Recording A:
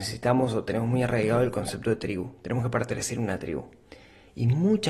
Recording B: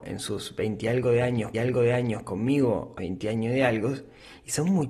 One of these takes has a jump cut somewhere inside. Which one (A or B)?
B